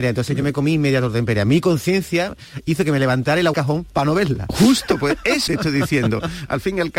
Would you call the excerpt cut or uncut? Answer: cut